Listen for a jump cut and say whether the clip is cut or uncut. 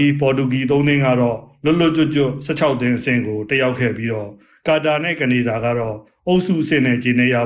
uncut